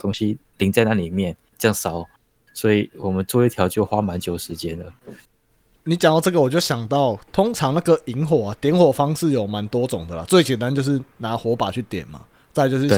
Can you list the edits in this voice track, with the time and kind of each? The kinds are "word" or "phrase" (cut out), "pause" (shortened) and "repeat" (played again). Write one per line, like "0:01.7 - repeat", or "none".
none